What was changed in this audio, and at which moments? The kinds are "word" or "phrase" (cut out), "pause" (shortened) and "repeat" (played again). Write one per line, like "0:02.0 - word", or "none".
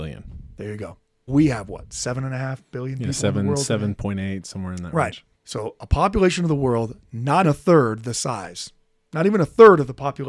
0:01.3 - word
0:05.3 - pause
0:07.4 - word